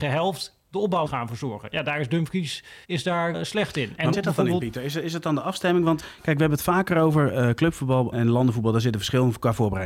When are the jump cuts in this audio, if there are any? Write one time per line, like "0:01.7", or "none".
0:01.1
0:02.8
0:03.3
0:04.1
0:06.0
0:08.1